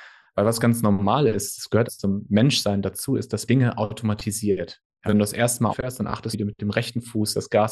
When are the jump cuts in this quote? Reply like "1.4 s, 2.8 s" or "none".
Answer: 1.9 s, 3.5 s, 5.1 s, 5.7 s, 6.3 s